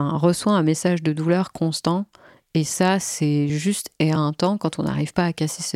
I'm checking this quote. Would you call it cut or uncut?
uncut